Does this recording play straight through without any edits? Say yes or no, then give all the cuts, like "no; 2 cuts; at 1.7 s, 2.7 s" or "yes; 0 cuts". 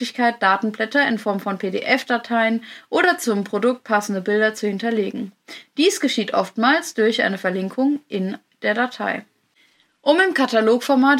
yes; 0 cuts